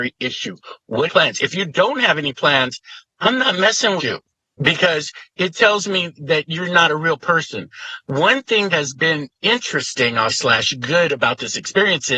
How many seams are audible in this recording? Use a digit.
5